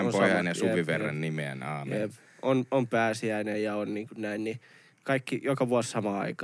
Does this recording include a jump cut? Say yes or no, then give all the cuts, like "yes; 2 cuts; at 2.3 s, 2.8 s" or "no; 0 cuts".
no; 0 cuts